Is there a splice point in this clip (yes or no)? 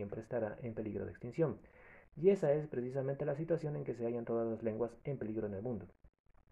no